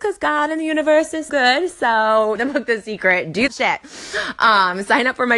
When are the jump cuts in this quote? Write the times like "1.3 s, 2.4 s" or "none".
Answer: 1.3 s, 2.4 s, 3.5 s